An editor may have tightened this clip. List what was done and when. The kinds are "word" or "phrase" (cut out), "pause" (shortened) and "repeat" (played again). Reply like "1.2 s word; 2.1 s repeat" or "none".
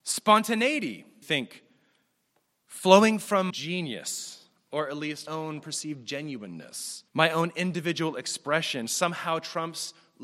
1.2 s word; 3.5 s phrase; 5.3 s word; 7.1 s pause